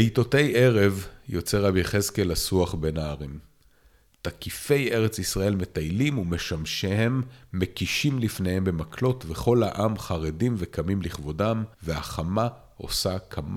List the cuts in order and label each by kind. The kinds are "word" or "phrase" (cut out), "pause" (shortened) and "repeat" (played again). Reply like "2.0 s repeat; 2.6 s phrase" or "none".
11.7 s pause